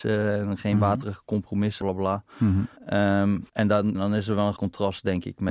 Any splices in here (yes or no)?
yes